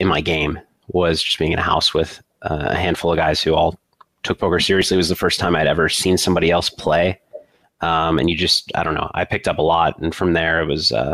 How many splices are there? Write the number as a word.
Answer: zero